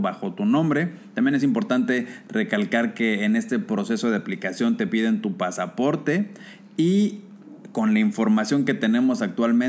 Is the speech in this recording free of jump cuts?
yes; 0 cuts

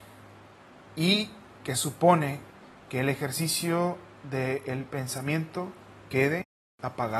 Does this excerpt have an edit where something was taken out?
no; 0 cuts

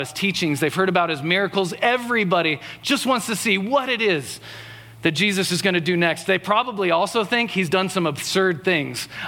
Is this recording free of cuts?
yes; 0 cuts

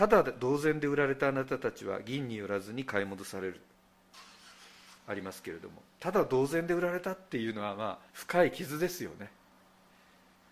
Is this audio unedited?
no; 2 cuts; at 5.0 s, 8.1 s

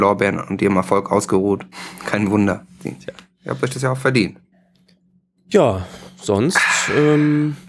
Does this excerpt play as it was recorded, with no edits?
yes; 0 cuts

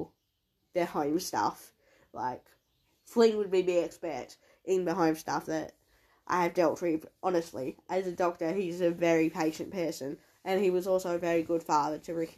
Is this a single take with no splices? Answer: yes; 0 cuts

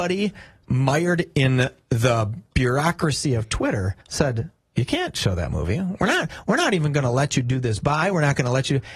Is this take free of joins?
no; 1 cut; at 4.0 s

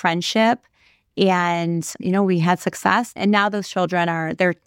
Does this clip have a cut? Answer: no; 0 cuts

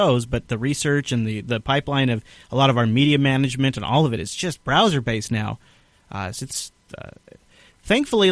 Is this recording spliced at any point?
no; 0 cuts

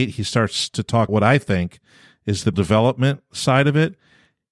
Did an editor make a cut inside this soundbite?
yes; 2 cuts; at 1.1 s, 2.5 s

